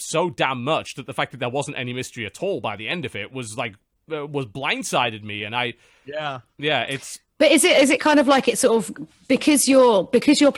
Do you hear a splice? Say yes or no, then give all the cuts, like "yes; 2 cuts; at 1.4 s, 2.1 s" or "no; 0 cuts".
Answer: no; 0 cuts